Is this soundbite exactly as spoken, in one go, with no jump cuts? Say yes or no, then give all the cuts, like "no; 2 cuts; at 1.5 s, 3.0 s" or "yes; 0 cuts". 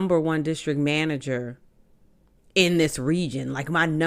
yes; 0 cuts